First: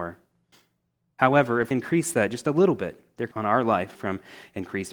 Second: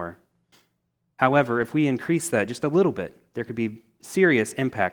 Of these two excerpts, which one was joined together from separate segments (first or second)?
first